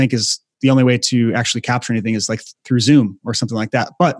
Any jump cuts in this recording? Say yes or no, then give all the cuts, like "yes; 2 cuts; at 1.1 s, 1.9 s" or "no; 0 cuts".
no; 0 cuts